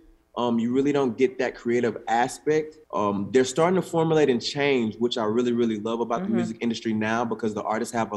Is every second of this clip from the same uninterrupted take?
no; 1 cut; at 2.8 s

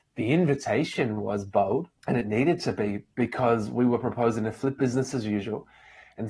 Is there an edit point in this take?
yes; 1 cut; at 2.0 s

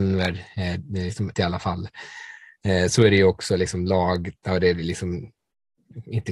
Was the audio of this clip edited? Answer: yes; 1 cut; at 1.3 s

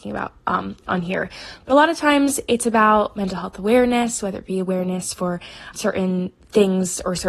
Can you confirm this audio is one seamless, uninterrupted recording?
no; 1 cut; at 5.7 s

